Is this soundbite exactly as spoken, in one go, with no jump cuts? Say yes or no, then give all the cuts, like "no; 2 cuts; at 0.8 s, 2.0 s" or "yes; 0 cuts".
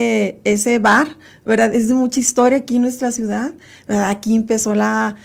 yes; 0 cuts